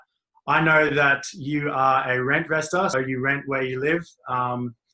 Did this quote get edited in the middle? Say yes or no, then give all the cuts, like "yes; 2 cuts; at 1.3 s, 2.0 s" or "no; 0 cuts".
yes; 1 cut; at 2.9 s